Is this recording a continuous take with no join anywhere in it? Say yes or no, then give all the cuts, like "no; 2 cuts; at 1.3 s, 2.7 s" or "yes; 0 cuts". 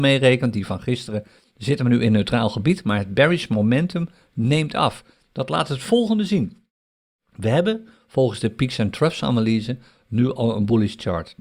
yes; 0 cuts